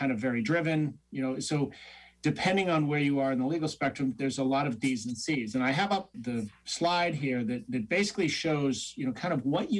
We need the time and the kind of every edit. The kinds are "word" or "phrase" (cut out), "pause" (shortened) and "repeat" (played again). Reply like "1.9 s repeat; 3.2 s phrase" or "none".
6.1 s word